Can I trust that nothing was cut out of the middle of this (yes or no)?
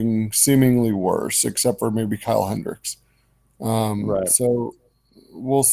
yes